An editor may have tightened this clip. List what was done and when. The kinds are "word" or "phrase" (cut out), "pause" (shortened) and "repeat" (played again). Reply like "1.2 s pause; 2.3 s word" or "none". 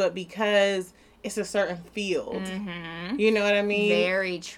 none

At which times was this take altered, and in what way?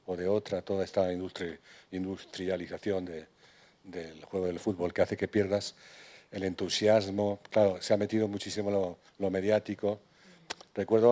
9.1 s pause

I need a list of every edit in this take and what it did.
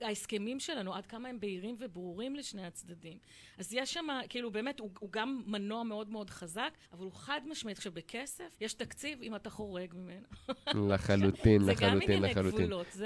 6.8 s pause; 8.5 s pause

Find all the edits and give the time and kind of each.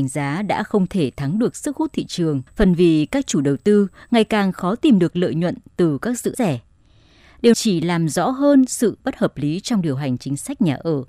2.5 s pause; 6.3 s phrase; 7.5 s word

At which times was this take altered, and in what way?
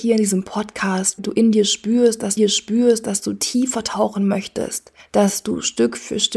1.2 s word; 2.4 s repeat

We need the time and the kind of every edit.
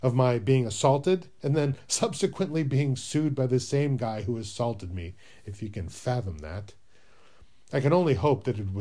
none

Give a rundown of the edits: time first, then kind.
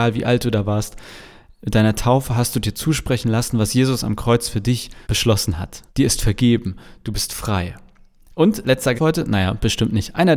5.0 s pause; 5.9 s pause; 8.9 s word

